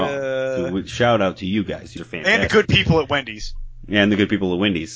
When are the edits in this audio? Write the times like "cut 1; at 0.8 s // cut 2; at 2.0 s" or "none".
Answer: cut 1; at 2.0 s

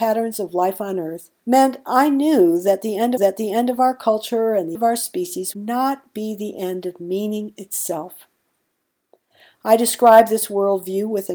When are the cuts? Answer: cut 1; at 1.4 s // cut 2; at 3.2 s // cut 3; at 4.8 s // cut 4; at 5.5 s

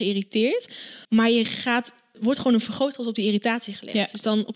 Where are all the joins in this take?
cut 1; at 1.0 s // cut 2; at 2.1 s

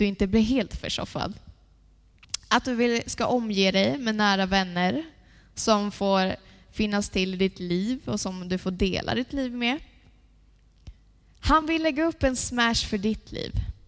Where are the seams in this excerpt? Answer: none

